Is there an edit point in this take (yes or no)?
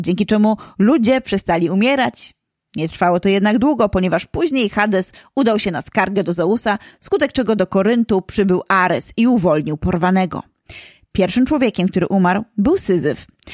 no